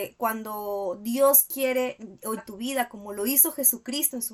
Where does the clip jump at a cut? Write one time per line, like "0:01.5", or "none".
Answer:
0:02.4